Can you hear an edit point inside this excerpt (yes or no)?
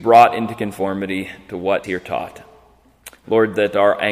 yes